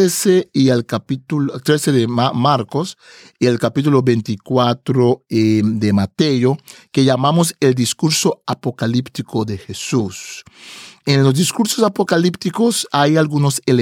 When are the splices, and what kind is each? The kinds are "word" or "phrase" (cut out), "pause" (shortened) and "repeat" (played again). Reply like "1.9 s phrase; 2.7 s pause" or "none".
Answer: none